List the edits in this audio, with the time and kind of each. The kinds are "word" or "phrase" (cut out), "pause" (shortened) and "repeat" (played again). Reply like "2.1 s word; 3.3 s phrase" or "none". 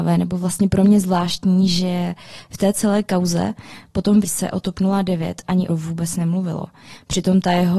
4.2 s word; 5.7 s phrase